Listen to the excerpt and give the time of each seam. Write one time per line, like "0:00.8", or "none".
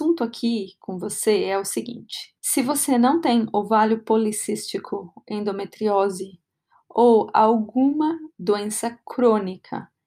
0:02.4
0:08.3

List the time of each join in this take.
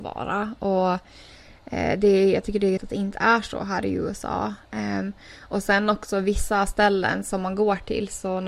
0:02.8

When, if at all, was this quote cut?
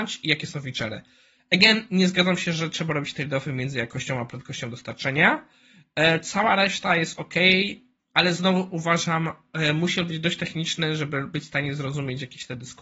none

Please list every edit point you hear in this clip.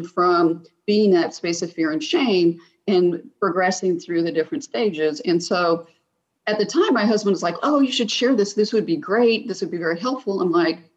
none

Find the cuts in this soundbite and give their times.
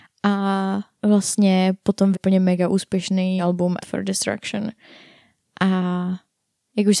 0:00.9
0:02.1
0:03.4
0:03.8

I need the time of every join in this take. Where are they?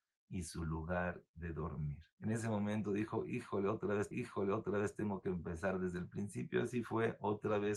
0:02.1
0:04.1

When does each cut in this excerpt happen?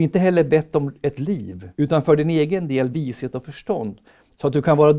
0:01.1
0:01.7
0:02.9

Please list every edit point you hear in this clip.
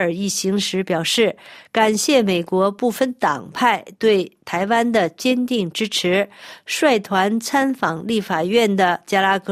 none

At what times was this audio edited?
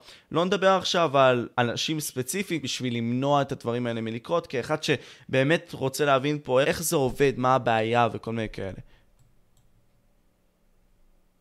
0:01.5
0:02.6
0:06.6

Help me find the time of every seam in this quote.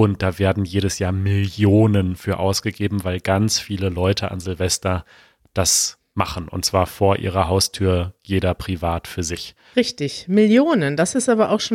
none

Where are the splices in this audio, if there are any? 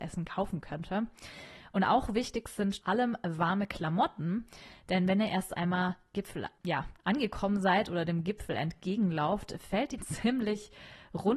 0:02.8
0:06.1
0:06.6
0:10.0

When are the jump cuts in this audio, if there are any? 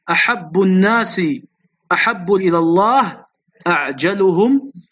0:02.4

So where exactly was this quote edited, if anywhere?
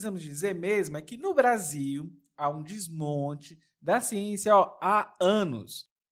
none

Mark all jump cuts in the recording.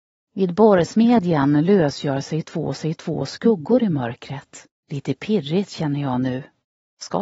0:02.7
0:04.8

